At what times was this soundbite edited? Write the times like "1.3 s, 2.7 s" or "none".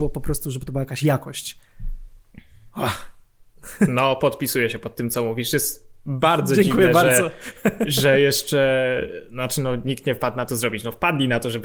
10.5 s